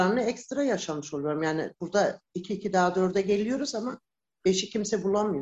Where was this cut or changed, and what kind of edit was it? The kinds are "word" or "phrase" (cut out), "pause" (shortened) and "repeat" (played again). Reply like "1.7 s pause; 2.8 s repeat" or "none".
1.8 s pause